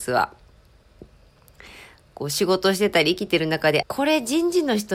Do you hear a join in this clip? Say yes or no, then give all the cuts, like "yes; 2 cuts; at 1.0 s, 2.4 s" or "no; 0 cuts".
yes; 1 cut; at 3.8 s